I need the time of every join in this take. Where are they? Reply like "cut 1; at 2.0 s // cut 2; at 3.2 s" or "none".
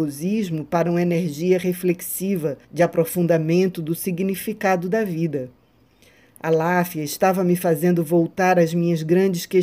cut 1; at 2.6 s